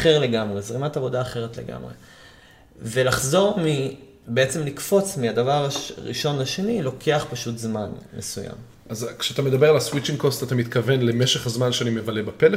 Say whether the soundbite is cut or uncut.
uncut